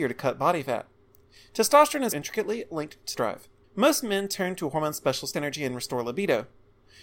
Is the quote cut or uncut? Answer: cut